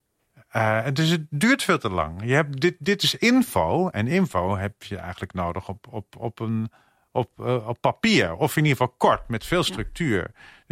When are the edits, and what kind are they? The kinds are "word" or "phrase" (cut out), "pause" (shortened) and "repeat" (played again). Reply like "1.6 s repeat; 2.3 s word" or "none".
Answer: none